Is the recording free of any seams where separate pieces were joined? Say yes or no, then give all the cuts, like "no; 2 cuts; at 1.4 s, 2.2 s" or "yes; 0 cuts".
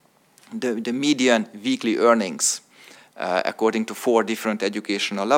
yes; 0 cuts